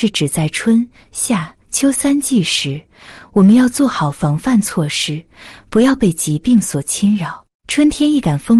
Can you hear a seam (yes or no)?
yes